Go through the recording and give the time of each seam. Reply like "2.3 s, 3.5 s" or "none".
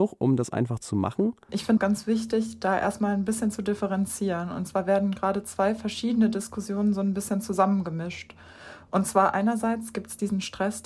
none